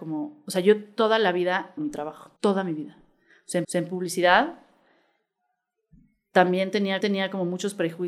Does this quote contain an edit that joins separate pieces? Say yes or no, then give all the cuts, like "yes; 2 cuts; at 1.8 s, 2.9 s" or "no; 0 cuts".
yes; 4 cuts; at 1.8 s, 2.4 s, 3.6 s, 7.0 s